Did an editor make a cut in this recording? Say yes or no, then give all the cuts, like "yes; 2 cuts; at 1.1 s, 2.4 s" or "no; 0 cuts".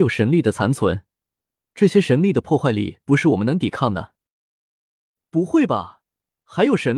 no; 0 cuts